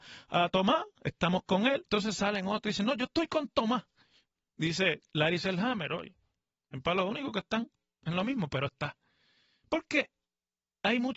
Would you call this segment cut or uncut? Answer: uncut